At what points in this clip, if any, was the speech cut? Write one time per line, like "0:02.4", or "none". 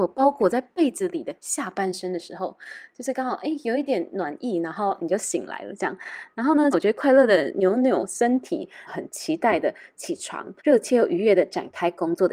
0:06.7
0:08.9
0:10.6